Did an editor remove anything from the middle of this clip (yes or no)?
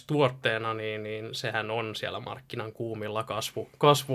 no